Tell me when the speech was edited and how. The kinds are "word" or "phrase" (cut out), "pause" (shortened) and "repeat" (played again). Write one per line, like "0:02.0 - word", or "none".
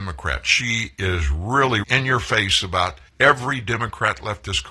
0:01.8 - word
0:03.1 - pause